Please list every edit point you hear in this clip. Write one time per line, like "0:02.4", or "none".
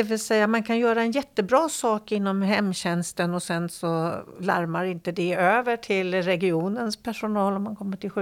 none